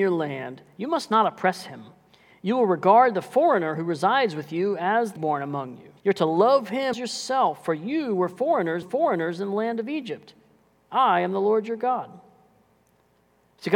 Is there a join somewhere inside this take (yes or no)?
yes